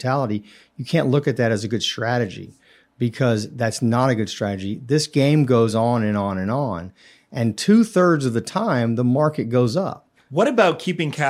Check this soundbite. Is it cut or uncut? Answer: uncut